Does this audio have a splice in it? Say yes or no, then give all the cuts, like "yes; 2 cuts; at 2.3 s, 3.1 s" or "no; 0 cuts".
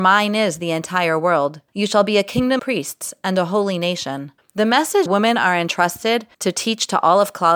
yes; 5 cuts; at 1.7 s, 2.6 s, 4.4 s, 5.1 s, 6.3 s